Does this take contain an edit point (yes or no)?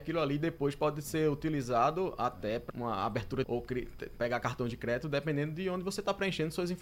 yes